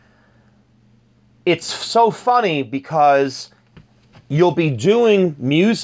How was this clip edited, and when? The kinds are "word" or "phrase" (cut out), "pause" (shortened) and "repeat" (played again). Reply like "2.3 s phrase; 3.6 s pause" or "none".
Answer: none